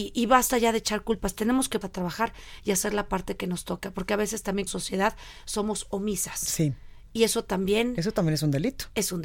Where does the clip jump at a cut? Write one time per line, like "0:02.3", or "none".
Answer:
0:01.8
0:04.7